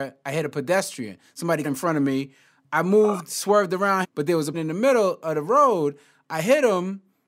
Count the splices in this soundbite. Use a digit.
3